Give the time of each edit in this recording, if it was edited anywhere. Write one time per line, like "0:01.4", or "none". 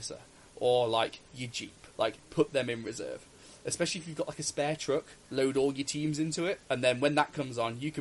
0:01.9
0:05.2
0:06.6